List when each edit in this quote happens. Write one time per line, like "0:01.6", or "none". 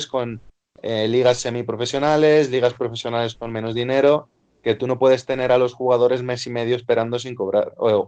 none